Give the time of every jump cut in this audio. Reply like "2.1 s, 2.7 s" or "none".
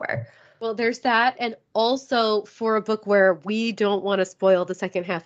none